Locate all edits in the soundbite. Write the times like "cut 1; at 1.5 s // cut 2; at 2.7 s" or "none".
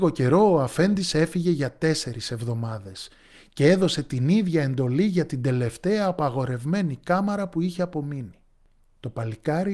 none